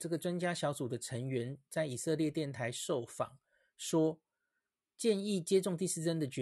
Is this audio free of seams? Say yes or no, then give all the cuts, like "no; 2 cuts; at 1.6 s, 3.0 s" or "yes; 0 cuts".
yes; 0 cuts